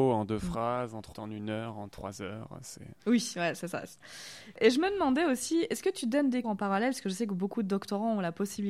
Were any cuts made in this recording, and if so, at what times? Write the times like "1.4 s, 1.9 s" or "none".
1.1 s, 6.4 s